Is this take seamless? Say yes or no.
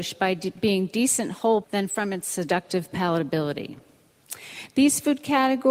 no